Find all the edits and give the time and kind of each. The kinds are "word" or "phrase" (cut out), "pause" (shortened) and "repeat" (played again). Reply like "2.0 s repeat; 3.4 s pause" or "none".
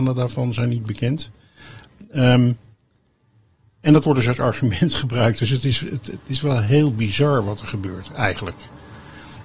none